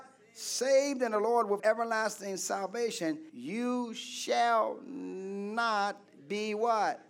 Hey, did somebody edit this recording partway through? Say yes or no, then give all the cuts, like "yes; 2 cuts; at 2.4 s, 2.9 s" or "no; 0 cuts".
yes; 2 cuts; at 1.6 s, 3.3 s